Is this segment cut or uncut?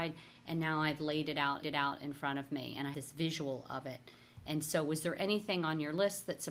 cut